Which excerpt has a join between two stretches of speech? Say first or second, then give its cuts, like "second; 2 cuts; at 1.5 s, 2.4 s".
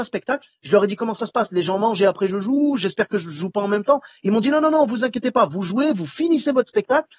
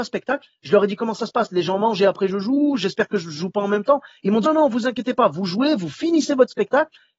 second; 1 cut; at 4.4 s